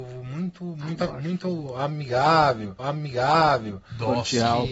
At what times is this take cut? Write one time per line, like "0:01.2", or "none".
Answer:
0:01.1
0:02.8